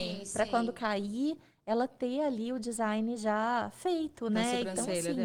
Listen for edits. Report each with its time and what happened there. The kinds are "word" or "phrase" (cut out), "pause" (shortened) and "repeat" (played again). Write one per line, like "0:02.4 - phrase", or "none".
none